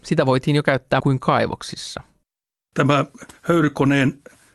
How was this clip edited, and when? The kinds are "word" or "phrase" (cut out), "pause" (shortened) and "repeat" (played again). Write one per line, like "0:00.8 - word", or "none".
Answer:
0:01.0 - word
0:03.4 - pause